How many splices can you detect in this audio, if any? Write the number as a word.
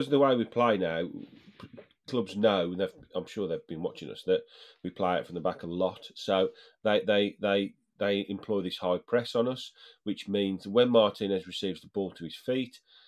one